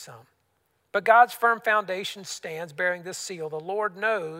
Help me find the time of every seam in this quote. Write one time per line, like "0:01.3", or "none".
none